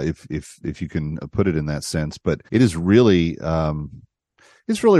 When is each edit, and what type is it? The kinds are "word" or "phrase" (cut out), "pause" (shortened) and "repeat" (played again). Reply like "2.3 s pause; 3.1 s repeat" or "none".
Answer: 2.5 s pause